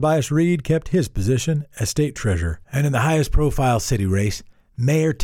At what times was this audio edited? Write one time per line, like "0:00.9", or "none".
0:02.6